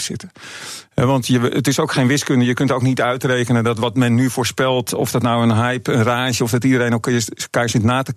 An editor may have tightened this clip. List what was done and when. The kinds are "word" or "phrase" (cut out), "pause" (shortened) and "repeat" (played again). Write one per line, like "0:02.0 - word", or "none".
0:06.4 - word